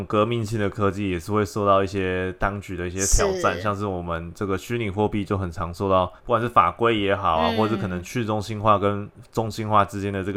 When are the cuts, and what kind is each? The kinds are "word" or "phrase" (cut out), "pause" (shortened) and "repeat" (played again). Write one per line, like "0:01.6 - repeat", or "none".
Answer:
0:06.2 - pause